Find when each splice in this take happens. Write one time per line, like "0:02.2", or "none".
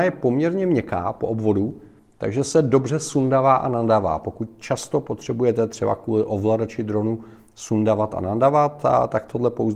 none